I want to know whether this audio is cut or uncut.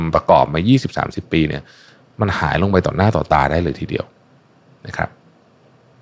uncut